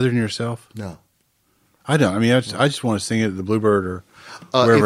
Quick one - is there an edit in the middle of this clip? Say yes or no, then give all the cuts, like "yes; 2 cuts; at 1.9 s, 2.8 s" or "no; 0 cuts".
no; 0 cuts